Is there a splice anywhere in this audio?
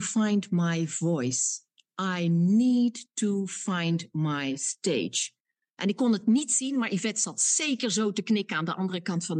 no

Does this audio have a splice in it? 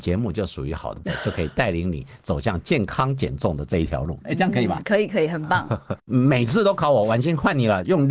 yes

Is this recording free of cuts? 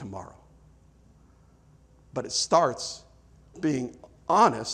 no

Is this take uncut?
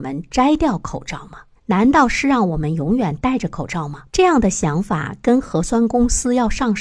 no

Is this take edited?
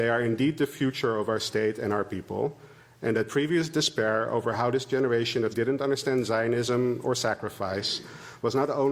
yes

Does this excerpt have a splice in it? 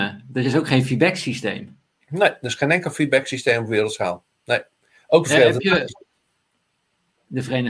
no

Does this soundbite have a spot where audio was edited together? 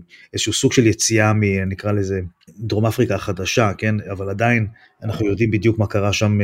yes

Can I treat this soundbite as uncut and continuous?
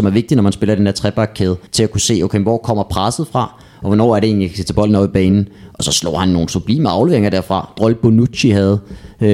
no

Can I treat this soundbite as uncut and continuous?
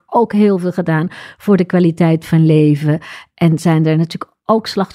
yes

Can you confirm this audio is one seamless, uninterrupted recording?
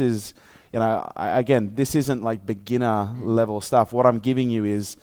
yes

